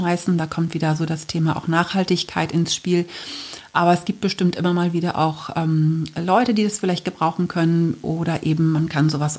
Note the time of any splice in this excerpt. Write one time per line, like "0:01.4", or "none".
none